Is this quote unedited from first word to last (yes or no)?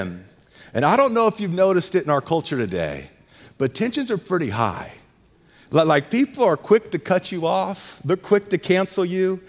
yes